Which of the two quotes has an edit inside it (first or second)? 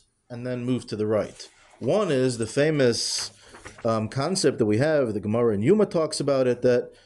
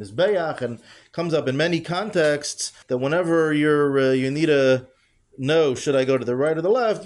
second